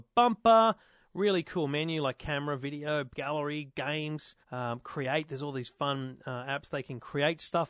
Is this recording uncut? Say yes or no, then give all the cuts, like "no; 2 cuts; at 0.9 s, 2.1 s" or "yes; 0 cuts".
no; 1 cut; at 4.4 s